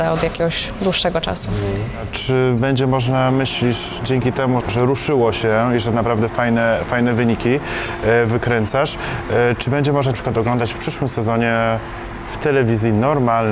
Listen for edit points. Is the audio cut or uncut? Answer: cut